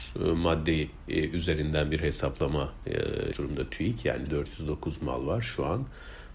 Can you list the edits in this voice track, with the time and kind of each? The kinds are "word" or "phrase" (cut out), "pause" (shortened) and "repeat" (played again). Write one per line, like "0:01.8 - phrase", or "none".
0:03.3 - word
0:04.3 - word